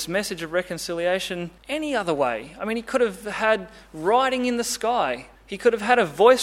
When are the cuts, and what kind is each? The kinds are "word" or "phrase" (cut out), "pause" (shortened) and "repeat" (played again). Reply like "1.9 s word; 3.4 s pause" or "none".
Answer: 1.6 s pause; 5.4 s pause